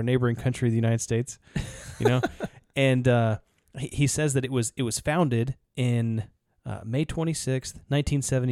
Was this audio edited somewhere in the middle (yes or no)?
no